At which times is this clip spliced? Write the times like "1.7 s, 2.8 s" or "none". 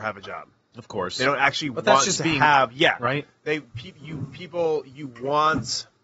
2.7 s